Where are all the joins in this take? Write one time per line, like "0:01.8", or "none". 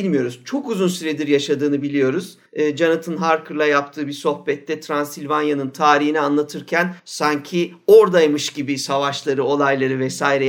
0:02.5
0:07.0